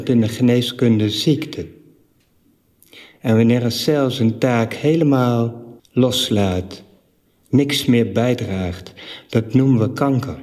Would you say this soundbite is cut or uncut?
cut